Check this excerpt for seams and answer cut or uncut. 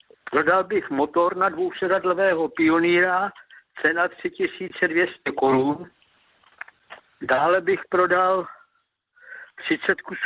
uncut